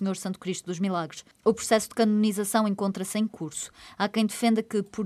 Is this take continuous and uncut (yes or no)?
yes